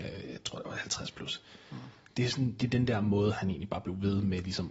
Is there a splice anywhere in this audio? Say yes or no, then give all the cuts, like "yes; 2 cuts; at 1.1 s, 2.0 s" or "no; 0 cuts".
no; 0 cuts